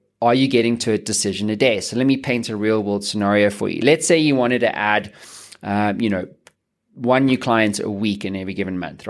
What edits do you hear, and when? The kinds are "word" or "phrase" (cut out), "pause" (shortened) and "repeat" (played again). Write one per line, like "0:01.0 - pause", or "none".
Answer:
none